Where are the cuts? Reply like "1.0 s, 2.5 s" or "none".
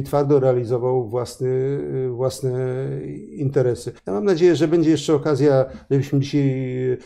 4.0 s